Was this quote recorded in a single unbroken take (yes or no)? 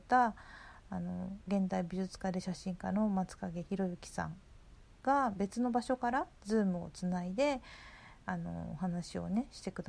no